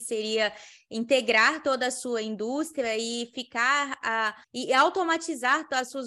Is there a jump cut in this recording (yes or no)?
yes